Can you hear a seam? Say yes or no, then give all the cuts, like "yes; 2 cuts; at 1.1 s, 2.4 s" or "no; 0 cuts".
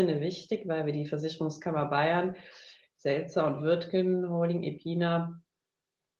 no; 0 cuts